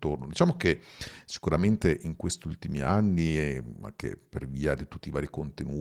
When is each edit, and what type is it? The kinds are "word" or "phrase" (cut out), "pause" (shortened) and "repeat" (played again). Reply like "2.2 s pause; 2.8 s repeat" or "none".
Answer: none